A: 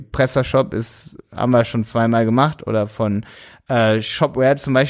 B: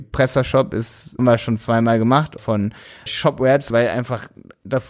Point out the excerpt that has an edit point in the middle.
B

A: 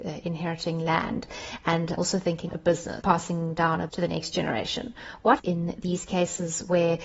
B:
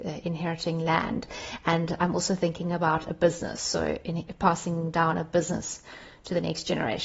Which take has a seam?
A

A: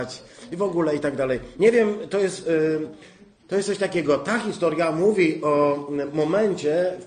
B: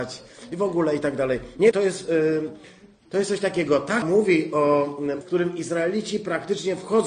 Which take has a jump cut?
B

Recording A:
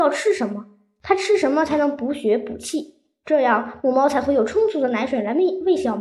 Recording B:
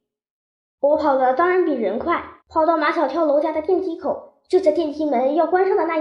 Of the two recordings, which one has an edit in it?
B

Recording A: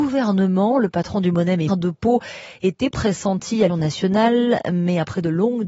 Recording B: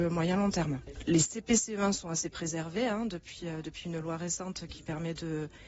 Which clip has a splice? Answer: A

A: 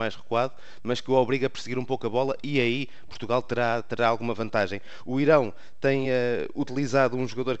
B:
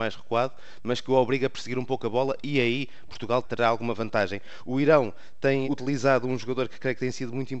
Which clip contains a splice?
B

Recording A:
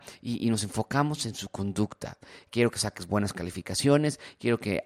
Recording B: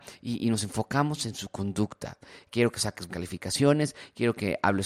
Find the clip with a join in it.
B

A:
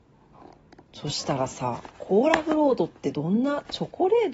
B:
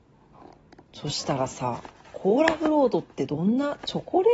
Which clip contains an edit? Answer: A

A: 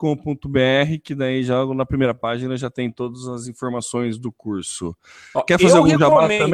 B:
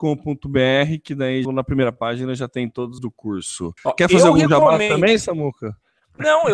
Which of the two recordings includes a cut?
B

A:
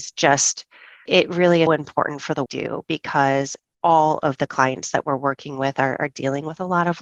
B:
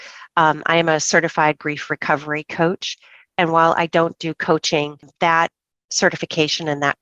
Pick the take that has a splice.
A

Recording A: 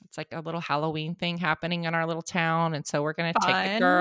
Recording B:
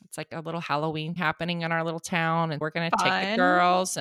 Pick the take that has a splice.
B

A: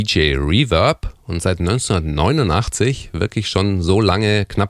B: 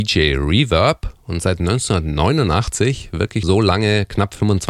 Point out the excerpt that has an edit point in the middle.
B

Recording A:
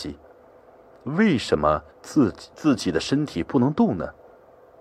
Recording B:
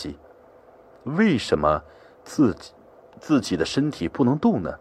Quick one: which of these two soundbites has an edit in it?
A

